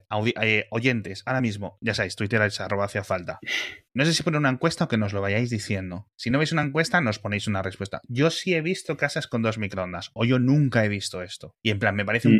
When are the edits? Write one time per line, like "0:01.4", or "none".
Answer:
none